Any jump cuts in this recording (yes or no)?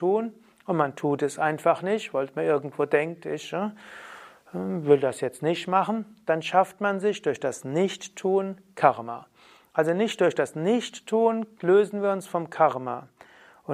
no